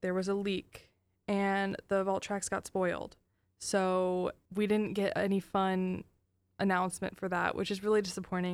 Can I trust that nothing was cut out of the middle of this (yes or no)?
yes